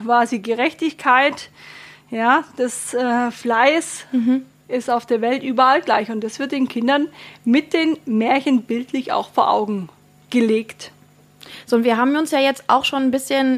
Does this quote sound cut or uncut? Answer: uncut